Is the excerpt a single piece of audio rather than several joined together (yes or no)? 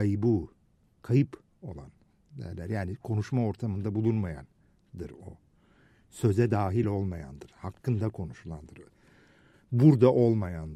yes